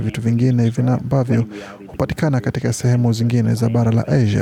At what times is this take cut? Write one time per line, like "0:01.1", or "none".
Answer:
none